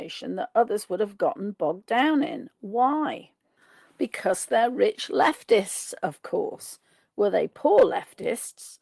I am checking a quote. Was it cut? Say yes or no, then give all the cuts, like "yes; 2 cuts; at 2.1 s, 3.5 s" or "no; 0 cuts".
no; 0 cuts